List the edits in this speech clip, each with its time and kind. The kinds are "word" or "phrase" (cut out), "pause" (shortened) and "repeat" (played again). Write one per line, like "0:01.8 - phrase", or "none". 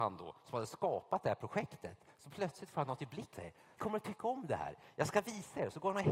0:03.3 - word
0:03.8 - word